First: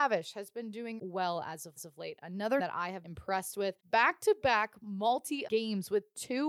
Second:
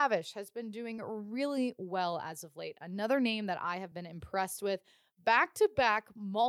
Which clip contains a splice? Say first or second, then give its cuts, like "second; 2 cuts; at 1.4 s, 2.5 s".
first; 6 cuts; at 1.0 s, 1.8 s, 2.6 s, 3.0 s, 3.8 s, 5.5 s